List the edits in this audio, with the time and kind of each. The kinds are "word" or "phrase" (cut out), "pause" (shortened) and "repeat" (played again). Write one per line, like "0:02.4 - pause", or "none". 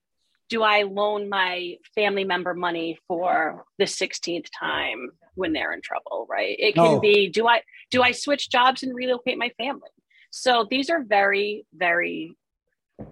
none